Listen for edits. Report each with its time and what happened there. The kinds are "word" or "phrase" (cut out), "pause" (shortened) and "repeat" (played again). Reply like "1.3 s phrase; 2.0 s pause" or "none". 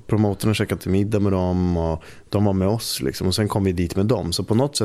none